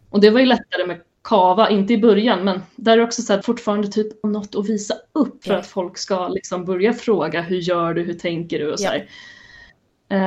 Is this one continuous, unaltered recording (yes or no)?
no